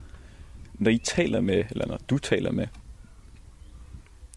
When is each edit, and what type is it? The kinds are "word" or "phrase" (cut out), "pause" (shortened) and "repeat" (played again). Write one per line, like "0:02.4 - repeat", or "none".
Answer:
none